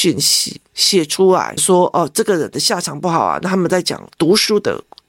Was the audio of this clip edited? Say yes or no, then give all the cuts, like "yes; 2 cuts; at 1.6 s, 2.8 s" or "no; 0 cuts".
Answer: yes; 1 cut; at 1.6 s